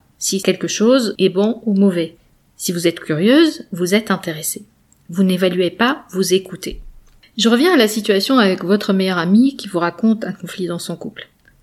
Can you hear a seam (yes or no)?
no